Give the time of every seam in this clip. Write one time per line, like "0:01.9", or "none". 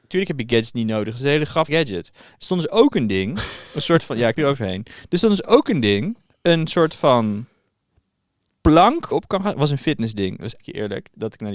0:01.7
0:04.3
0:09.1
0:10.6